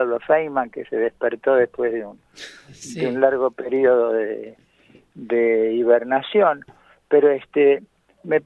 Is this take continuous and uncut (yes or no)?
yes